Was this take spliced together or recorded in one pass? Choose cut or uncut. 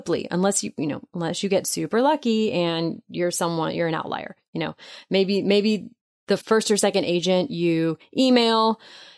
cut